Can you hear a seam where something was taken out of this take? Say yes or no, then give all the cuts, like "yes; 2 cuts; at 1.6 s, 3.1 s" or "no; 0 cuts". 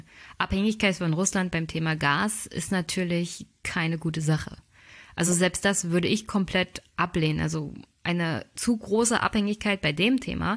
no; 0 cuts